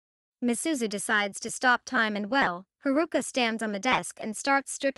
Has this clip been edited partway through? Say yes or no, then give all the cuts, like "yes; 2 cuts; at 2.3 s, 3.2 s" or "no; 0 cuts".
yes; 1 cut; at 2.7 s